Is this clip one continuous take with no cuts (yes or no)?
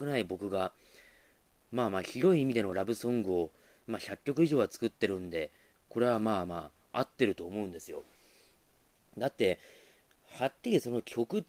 yes